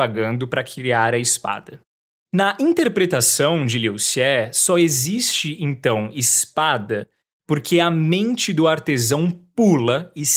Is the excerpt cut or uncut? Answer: uncut